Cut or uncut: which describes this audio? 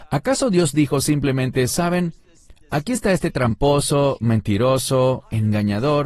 uncut